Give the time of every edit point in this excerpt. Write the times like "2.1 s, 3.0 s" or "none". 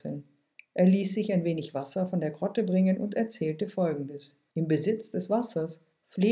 4.5 s